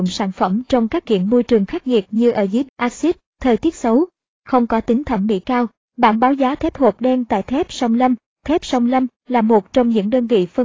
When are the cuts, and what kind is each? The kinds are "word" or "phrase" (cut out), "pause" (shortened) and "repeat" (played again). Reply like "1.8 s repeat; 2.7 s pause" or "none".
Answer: 1.0 s word; 2.6 s word

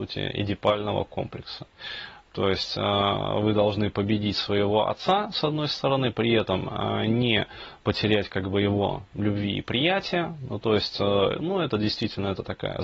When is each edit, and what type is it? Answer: none

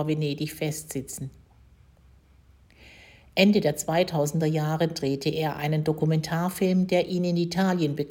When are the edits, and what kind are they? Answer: none

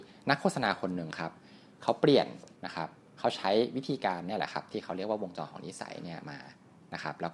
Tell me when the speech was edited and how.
2.6 s pause

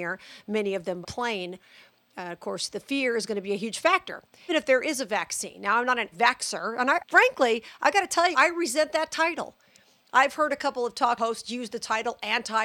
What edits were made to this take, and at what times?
1.0 s word; 4.5 s word; 6.1 s word; 7.0 s word; 8.3 s word; 11.2 s word

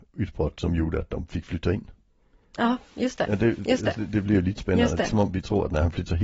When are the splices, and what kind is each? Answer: none

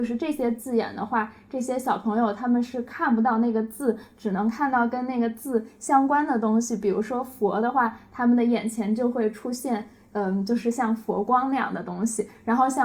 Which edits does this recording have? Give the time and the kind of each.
none

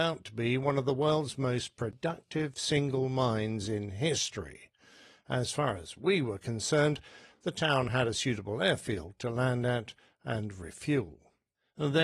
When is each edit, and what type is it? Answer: none

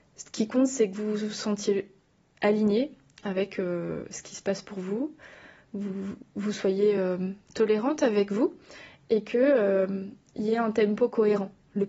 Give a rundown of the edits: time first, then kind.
none

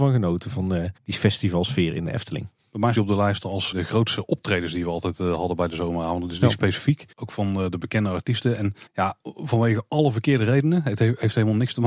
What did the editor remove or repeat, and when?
1.0 s pause; 2.6 s pause; 2.9 s word; 3.7 s word; 7.1 s pause; 8.9 s pause

